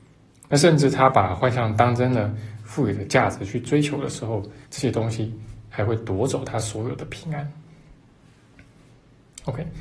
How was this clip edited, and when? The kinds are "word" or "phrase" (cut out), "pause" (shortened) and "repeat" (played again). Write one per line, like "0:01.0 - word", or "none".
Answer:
0:04.6 - pause